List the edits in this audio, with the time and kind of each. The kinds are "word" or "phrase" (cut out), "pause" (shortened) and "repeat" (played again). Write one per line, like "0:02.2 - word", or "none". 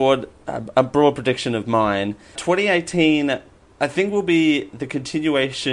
0:02.4 - word